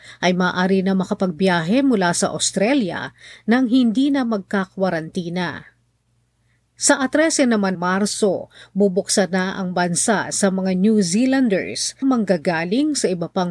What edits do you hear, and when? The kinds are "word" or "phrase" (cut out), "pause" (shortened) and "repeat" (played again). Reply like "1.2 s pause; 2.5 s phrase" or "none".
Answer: 7.7 s word; 12.0 s word